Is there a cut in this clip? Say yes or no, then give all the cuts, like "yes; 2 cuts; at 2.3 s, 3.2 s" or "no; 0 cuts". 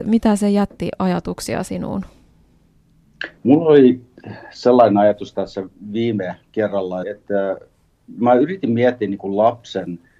yes; 2 cuts; at 3.4 s, 7.0 s